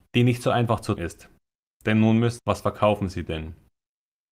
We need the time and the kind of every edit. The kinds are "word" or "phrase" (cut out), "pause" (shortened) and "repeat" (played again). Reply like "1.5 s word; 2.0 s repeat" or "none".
1.0 s word; 2.4 s phrase